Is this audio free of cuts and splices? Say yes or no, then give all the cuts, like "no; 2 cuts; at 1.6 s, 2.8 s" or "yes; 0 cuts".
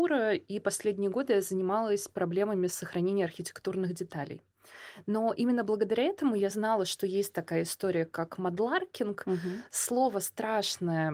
yes; 0 cuts